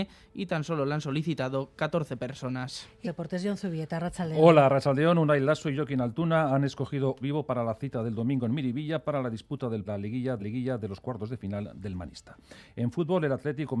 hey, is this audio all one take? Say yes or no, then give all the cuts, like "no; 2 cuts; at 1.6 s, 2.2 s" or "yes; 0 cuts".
no; 4 cuts; at 3.0 s, 7.2 s, 9.9 s, 10.4 s